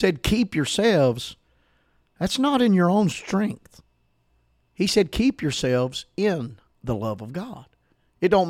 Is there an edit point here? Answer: no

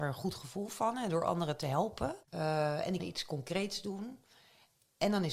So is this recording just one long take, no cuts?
no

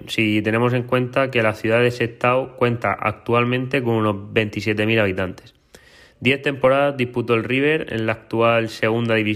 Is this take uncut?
yes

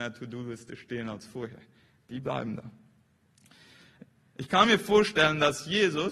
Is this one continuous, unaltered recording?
yes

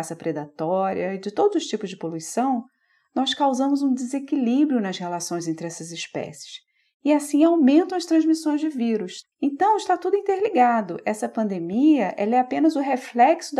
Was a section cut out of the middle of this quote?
yes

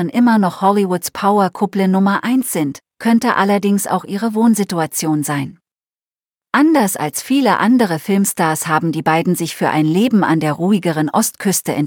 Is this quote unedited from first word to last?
yes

